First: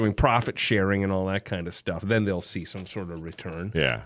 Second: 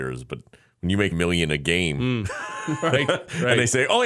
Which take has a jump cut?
second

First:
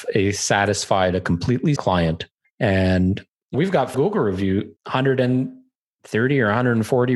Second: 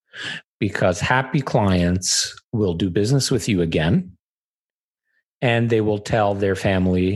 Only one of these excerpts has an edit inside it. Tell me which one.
first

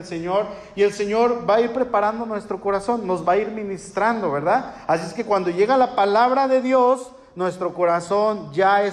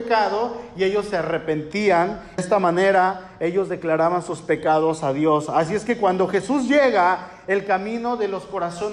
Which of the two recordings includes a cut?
second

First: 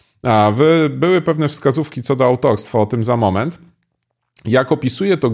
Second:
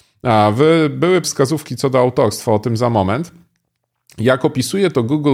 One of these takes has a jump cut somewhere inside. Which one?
second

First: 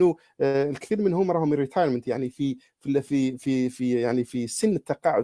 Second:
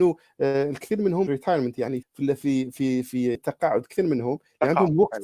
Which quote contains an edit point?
second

